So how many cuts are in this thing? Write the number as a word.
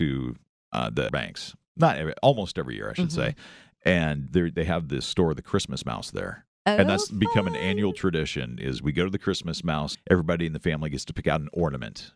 three